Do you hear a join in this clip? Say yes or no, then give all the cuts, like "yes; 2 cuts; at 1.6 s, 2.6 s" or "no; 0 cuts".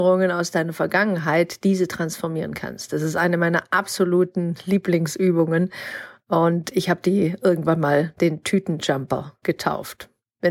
no; 0 cuts